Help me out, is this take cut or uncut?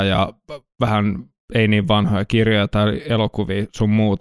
uncut